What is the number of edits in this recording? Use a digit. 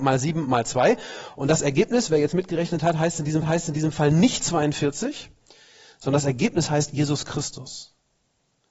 1